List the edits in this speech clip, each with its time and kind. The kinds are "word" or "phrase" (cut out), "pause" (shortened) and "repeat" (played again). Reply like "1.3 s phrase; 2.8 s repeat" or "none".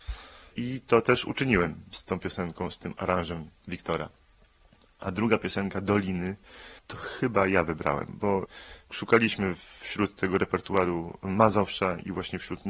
6.8 s pause